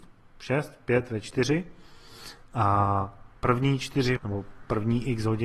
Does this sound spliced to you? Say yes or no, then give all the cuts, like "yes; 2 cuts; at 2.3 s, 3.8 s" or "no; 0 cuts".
yes; 2 cuts; at 3.4 s, 4.2 s